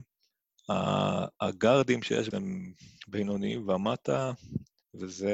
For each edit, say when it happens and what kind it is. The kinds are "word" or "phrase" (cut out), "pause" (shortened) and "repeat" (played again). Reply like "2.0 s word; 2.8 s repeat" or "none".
2.3 s word